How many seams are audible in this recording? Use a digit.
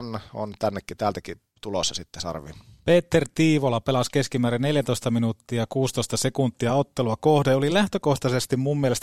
0